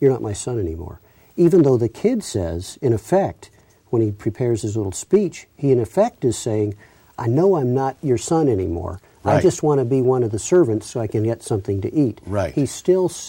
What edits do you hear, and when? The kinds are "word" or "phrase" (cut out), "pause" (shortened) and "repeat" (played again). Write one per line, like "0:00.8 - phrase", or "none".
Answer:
none